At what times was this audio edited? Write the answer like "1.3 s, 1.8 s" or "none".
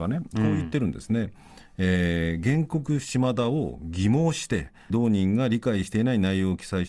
4.9 s